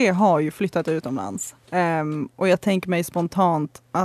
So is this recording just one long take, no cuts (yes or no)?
no